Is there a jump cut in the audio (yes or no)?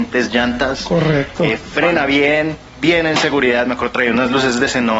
no